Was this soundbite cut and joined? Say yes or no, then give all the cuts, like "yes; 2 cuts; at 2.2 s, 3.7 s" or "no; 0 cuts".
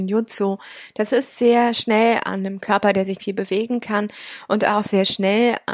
yes; 2 cuts; at 2.2 s, 3.2 s